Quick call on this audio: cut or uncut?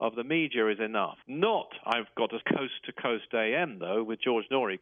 cut